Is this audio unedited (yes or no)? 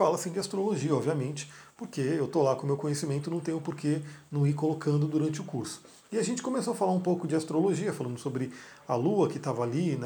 yes